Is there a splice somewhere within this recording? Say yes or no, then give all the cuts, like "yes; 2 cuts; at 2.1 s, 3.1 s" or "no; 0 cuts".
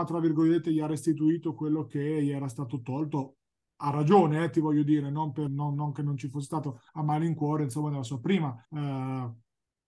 yes; 3 cuts; at 5.5 s, 6.9 s, 8.6 s